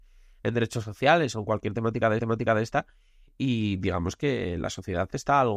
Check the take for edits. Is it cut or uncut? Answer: cut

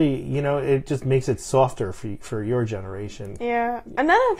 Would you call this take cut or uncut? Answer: uncut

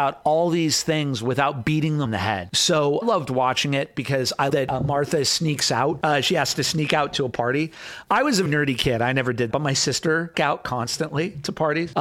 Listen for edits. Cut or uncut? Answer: cut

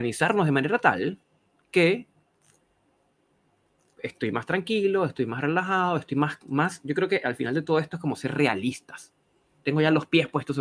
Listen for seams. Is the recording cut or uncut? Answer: uncut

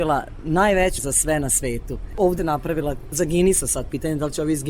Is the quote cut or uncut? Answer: cut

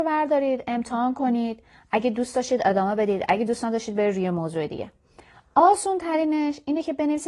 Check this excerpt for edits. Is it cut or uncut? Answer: uncut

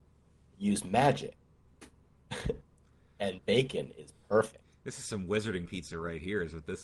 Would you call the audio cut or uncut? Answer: cut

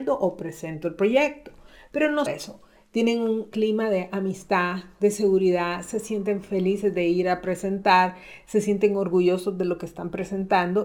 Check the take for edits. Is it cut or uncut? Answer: cut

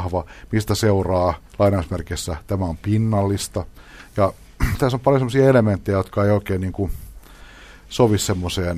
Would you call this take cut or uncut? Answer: cut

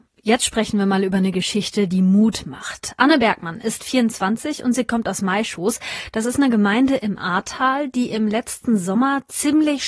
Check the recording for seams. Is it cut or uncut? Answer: uncut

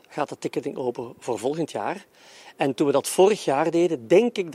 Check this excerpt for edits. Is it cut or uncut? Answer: uncut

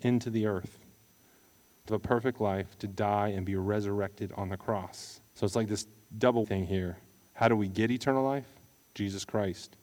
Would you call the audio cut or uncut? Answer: cut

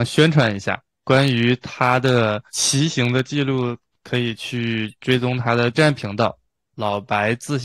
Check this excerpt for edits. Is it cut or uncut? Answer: cut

